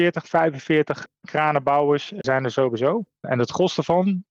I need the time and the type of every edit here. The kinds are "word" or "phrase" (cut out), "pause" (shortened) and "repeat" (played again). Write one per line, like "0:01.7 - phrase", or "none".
none